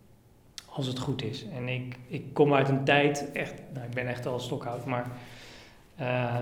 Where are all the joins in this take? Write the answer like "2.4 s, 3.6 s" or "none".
none